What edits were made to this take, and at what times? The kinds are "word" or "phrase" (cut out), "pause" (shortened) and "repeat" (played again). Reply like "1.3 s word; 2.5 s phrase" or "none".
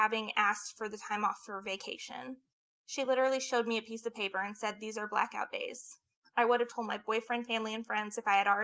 none